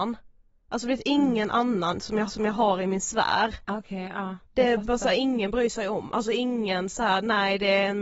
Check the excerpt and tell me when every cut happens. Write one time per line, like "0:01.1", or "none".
0:02.3
0:03.6
0:04.4